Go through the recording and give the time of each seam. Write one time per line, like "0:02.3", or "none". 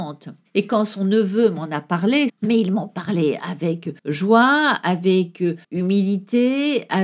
0:04.0
0:05.6